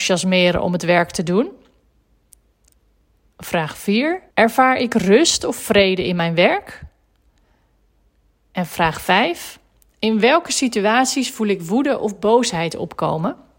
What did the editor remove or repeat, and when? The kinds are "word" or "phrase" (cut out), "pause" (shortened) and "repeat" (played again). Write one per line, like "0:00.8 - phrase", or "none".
0:04.3 - pause